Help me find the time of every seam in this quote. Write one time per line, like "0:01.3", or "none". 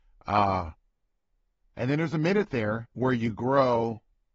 0:02.9